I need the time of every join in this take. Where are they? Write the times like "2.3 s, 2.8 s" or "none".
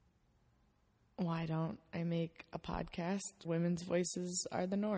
3.4 s

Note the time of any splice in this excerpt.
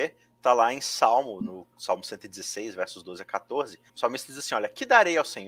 1.7 s, 3.9 s

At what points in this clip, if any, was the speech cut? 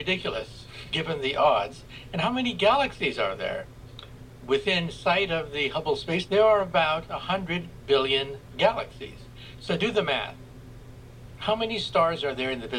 6.3 s

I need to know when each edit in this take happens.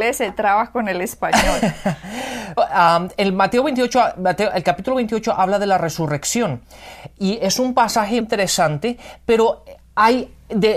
2.6 s, 8.2 s

